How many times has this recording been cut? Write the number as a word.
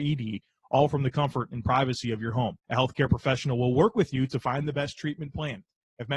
one